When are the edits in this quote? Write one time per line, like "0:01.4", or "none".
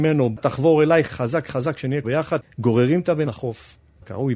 0:01.0
0:02.0
0:03.3

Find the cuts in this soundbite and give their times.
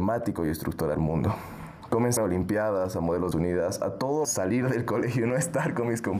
0:00.9
0:02.2
0:03.3
0:04.2

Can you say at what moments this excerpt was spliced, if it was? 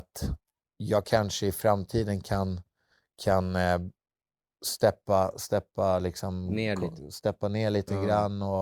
none

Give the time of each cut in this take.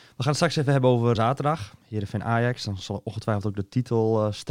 0:01.1

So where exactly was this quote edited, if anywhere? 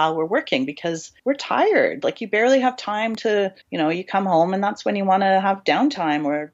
0:01.2
0:03.6

